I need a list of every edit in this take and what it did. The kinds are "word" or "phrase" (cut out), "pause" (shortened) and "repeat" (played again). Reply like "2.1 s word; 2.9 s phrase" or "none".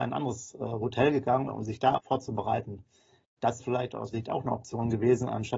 1.5 s word; 2.0 s word; 3.6 s word; 4.1 s word